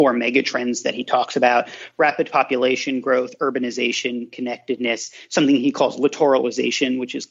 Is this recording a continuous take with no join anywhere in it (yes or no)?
yes